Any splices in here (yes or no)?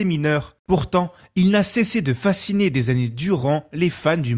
no